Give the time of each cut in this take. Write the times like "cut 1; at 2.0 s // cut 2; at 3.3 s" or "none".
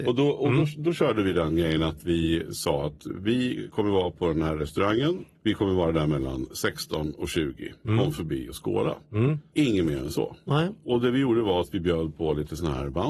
none